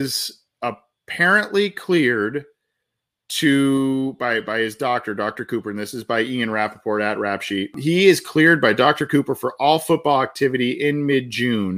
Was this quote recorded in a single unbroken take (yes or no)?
yes